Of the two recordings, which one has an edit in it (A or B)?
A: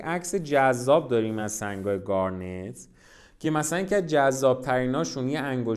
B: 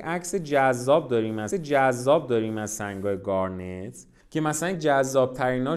B